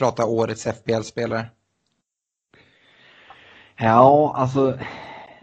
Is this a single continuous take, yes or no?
yes